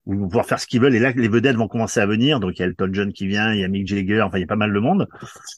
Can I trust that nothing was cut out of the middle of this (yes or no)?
yes